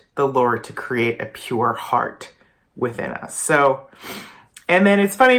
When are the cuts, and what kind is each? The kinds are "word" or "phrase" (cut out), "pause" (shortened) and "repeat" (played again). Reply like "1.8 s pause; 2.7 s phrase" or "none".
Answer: none